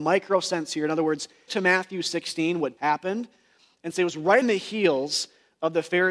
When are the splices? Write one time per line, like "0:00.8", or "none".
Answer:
0:01.5
0:02.8
0:04.4

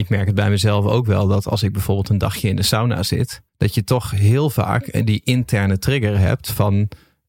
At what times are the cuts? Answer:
0:03.5

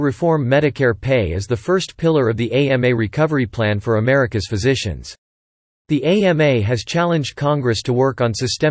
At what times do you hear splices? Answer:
none

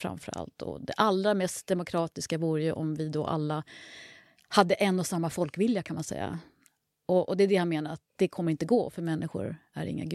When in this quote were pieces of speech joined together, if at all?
none

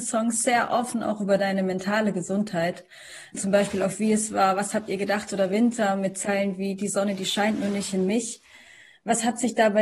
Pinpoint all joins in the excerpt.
none

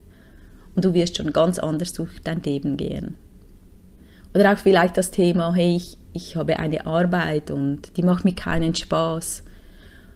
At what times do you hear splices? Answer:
none

